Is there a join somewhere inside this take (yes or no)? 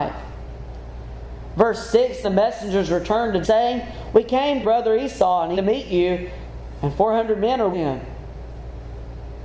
yes